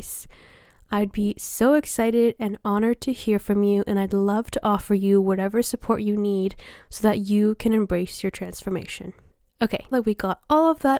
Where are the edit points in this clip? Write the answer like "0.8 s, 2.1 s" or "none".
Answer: 9.9 s